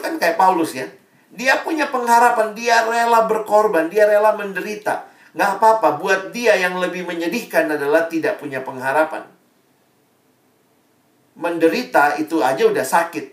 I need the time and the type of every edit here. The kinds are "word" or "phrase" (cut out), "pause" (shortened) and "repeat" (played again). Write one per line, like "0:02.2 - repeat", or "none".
none